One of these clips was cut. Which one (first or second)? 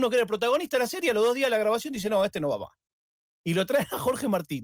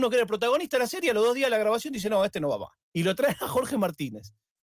second